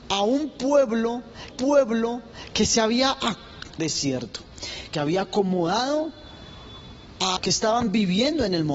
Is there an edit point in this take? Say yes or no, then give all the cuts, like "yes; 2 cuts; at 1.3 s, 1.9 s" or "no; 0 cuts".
yes; 4 cuts; at 1.5 s, 3.8 s, 4.9 s, 7.4 s